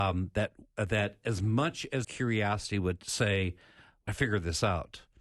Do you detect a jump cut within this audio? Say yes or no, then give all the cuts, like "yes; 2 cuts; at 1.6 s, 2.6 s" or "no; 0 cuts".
yes; 2 cuts; at 2.0 s, 4.1 s